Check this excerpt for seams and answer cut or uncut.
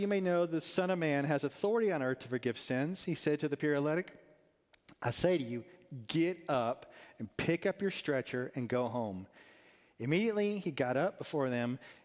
uncut